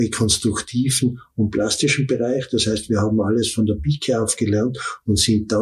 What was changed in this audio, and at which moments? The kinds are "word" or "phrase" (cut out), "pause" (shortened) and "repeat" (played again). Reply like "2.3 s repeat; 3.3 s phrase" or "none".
none

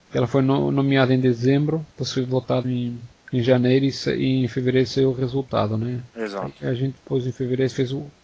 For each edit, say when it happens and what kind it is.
2.6 s word

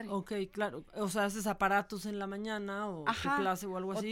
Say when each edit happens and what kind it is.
none

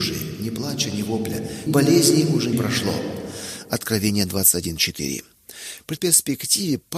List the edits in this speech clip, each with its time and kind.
1.7 s word; 2.5 s phrase; 6.0 s word

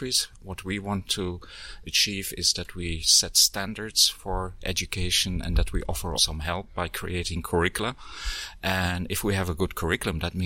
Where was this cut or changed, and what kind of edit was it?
6.2 s word

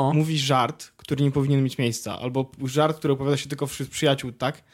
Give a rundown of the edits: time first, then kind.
none

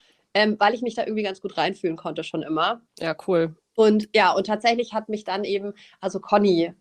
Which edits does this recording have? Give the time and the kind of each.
2.9 s pause

